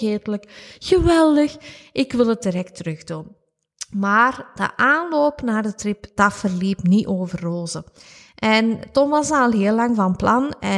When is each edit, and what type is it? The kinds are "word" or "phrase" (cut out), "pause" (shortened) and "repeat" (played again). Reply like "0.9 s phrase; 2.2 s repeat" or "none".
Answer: none